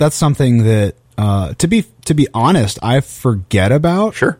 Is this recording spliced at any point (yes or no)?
yes